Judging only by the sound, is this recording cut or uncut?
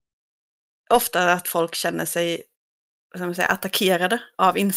uncut